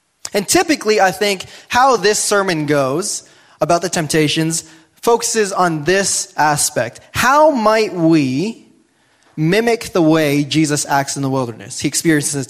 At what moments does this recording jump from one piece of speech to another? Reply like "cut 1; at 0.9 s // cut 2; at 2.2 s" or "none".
none